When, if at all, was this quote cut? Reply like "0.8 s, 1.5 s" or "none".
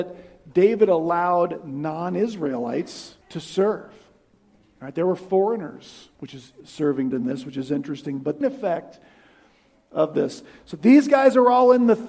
3.2 s, 6.1 s, 6.6 s, 7.1 s, 8.4 s